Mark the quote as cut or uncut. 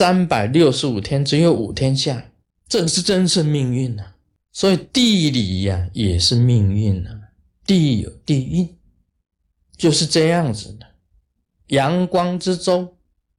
uncut